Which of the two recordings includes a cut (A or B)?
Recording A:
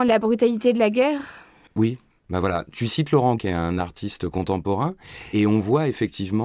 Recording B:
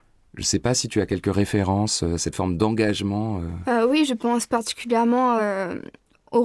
A